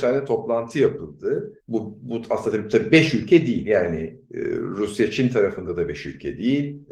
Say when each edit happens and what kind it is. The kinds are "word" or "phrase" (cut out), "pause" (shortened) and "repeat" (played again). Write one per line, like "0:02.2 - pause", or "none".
0:01.6 - pause